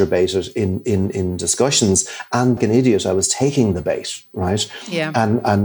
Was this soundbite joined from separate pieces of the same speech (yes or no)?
yes